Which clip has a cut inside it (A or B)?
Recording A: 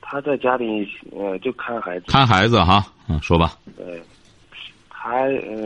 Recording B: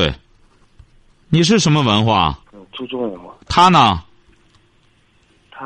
B